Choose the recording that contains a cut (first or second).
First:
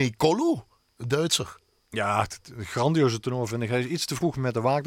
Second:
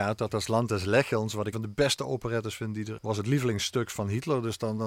second